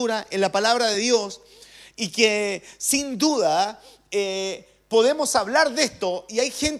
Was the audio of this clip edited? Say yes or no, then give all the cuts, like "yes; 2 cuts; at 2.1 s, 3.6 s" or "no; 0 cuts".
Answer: no; 0 cuts